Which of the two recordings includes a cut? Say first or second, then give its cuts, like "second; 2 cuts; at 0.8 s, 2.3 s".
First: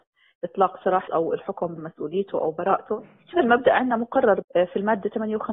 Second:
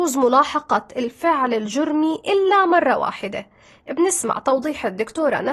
first; 4 cuts; at 1.1 s, 1.8 s, 3.3 s, 4.4 s